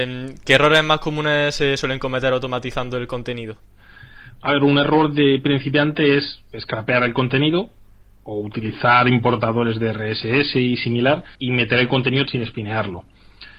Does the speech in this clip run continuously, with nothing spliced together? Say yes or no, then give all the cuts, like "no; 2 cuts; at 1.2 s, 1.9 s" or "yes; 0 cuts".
no; 2 cuts; at 11.3 s, 12.3 s